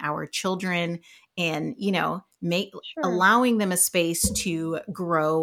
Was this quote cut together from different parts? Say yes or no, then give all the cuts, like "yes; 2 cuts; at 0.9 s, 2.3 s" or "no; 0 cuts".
no; 0 cuts